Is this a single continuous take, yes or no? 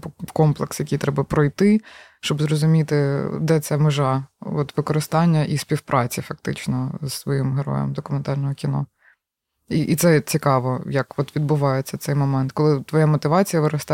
yes